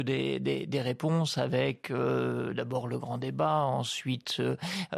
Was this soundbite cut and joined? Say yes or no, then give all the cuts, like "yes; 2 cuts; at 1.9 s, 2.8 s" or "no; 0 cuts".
no; 0 cuts